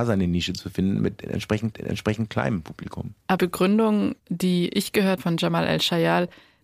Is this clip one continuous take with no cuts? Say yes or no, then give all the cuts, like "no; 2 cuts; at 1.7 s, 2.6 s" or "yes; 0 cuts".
no; 4 cuts; at 1.7 s, 3.4 s, 4.2 s, 5.2 s